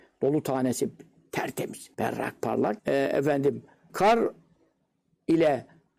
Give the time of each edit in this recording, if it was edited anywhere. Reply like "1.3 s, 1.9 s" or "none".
1.9 s, 2.8 s, 3.9 s